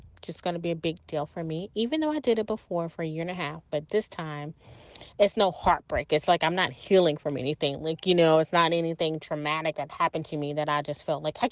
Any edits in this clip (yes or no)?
no